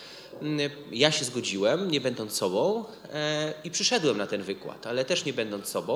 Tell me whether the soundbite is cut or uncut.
uncut